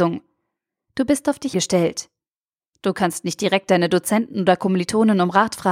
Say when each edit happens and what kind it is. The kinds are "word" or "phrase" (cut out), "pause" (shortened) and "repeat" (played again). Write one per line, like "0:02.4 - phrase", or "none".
0:01.5 - word